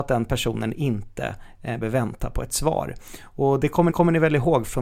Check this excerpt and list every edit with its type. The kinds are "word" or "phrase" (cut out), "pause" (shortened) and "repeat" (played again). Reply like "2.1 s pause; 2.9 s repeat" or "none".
1.8 s word; 3.9 s repeat